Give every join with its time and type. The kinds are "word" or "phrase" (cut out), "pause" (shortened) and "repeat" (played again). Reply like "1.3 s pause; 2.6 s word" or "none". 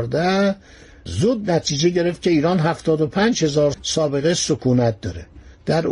1.1 s word; 3.7 s word